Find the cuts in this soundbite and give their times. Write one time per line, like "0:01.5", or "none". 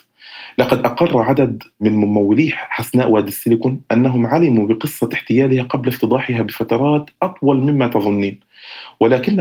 none